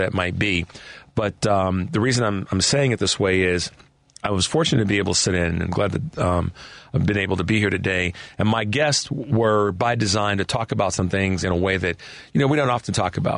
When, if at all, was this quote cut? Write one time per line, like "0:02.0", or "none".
none